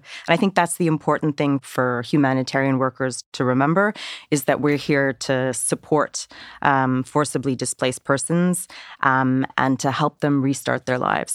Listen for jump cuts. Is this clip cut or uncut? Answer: uncut